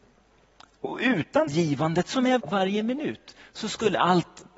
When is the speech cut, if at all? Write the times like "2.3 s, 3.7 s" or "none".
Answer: 1.5 s, 2.4 s